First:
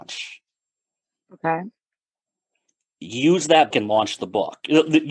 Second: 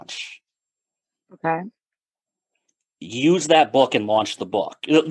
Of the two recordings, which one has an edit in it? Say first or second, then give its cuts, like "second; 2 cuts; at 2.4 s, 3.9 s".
first; 1 cut; at 3.7 s